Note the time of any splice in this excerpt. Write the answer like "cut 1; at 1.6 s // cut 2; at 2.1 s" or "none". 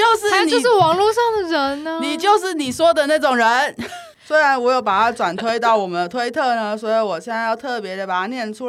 cut 1; at 4.1 s